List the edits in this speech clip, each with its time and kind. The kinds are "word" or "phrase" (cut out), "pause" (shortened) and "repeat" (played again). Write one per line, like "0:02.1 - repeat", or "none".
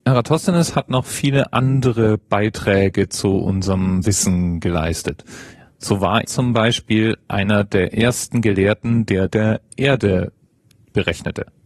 0:06.2 - word
0:09.3 - phrase